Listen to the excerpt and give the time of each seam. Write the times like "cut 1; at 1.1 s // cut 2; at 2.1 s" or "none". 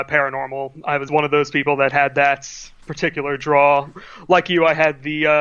cut 1; at 1.1 s